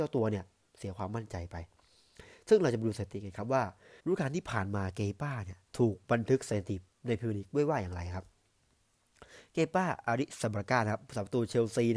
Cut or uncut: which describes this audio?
cut